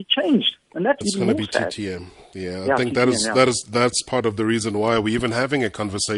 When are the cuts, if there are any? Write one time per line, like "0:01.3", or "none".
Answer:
0:01.0